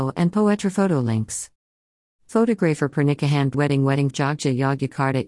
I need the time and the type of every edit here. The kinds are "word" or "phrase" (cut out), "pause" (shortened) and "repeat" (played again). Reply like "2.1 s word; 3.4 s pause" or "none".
3.5 s word; 4.1 s word